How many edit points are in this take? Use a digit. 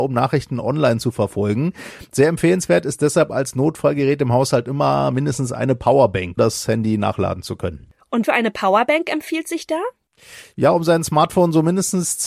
2